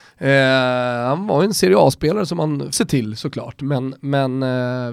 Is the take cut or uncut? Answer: cut